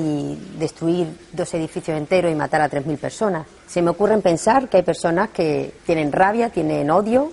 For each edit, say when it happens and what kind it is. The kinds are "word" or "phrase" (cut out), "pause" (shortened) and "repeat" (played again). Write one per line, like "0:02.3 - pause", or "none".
0:03.6 - pause
0:05.8 - pause